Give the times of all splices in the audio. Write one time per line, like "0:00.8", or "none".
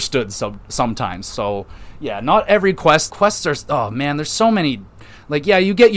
0:03.1

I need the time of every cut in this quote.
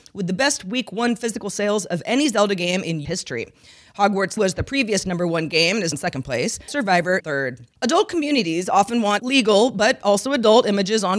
0:03.0
0:04.4
0:05.9
0:06.7
0:07.2
0:07.8
0:09.2

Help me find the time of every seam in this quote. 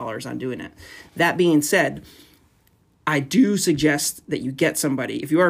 none

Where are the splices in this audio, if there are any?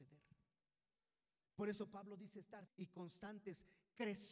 0:02.7

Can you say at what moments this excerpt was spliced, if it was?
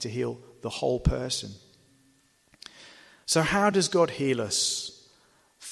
none

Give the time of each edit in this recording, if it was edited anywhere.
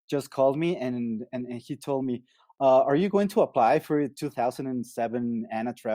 none

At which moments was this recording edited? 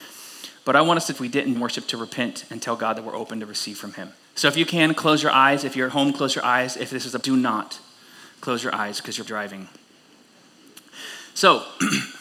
0:01.1
0:01.5
0:04.2
0:07.2
0:09.3

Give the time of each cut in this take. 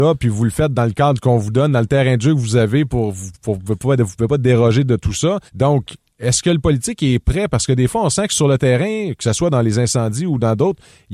0:05.5

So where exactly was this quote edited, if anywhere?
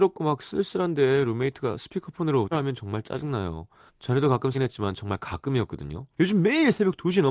0:02.5
0:03.9
0:04.5
0:06.1

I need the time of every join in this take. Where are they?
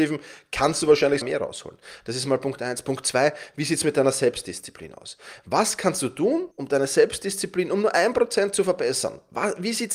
0:01.2
0:06.5

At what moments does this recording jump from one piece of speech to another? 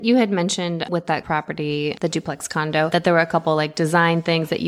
0:01.2

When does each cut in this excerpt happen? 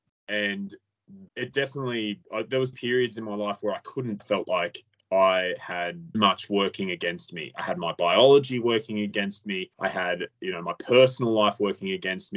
0:01.3
0:02.2
0:02.7
0:04.2
0:06.1
0:09.7

